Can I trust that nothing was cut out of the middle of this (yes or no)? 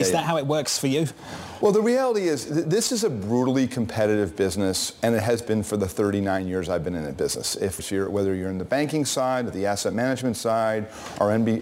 no